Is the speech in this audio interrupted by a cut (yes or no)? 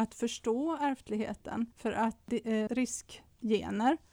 yes